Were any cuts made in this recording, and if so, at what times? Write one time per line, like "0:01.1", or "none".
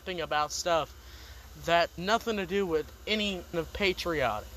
0:02.0
0:03.5